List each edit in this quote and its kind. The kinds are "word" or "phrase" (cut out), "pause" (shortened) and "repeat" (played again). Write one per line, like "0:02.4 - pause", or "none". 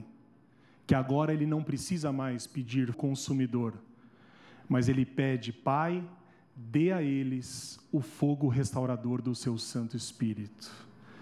0:02.9 - word

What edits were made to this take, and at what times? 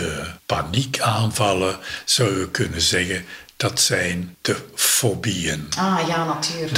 none

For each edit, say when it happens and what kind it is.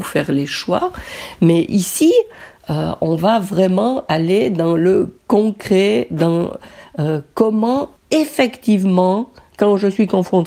0:05.2 - pause
0:08.0 - pause

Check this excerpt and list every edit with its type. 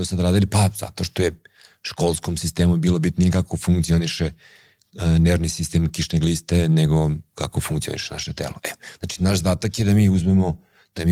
none

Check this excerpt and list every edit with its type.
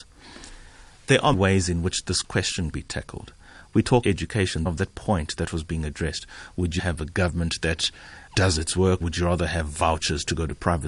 0:01.3 - word
0:02.7 - word
0:04.0 - word
0:04.7 - word
0:06.8 - word
0:08.3 - word
0:09.0 - word

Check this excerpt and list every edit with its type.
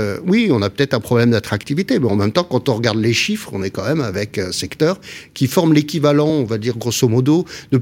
none

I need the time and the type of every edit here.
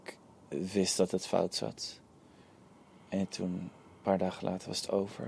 none

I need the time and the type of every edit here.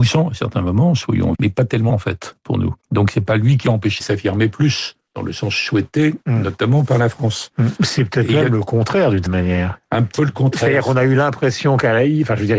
0:01.3 - word
0:01.9 - word
0:02.8 - pause
0:04.0 - phrase
0:05.1 - pause
0:09.3 - word
0:10.2 - word

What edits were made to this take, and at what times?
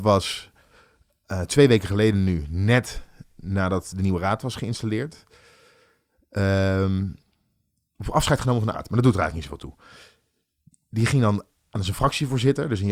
0:08.7 - word

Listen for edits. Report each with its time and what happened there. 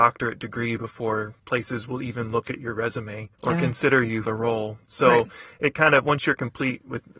0:01.4 - pause
0:03.3 - pause
0:04.2 - word

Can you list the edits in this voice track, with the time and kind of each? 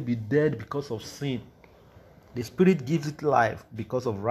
none

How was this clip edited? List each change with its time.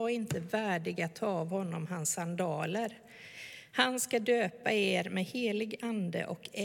none

